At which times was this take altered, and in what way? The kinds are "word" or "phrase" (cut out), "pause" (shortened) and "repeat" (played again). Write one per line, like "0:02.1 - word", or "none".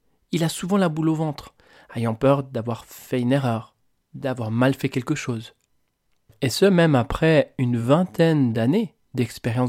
none